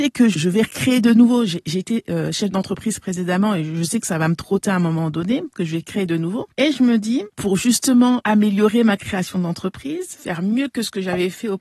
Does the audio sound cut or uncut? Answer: uncut